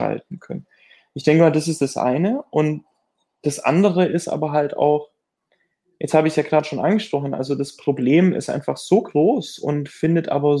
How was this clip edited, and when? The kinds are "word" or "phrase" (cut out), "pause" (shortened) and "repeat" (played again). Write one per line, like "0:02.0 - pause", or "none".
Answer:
none